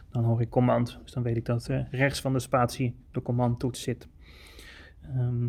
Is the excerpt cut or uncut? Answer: uncut